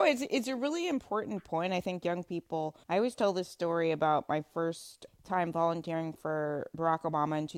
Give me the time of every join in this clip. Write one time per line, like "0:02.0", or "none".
0:02.8
0:05.1